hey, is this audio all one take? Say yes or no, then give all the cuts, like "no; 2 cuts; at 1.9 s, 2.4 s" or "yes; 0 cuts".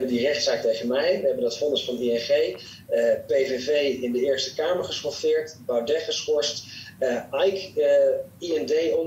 yes; 0 cuts